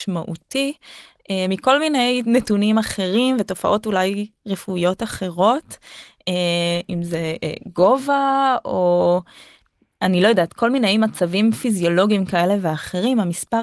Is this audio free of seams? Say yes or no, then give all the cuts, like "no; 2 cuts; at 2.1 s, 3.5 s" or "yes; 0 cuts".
yes; 0 cuts